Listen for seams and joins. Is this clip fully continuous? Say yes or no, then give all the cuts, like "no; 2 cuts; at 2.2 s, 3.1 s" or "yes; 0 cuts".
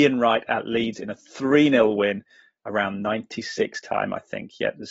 yes; 0 cuts